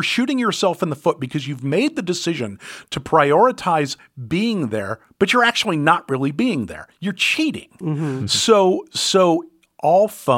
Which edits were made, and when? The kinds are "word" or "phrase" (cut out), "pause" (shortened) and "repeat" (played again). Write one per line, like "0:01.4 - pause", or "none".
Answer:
none